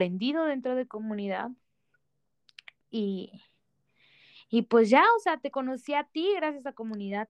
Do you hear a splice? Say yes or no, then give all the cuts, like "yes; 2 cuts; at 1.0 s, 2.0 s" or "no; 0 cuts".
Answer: no; 0 cuts